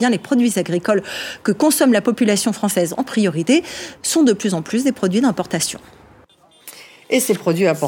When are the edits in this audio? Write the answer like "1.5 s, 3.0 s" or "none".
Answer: none